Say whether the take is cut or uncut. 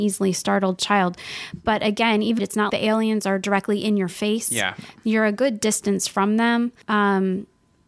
cut